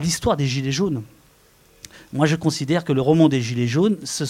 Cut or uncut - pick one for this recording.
uncut